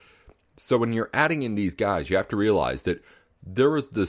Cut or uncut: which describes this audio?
uncut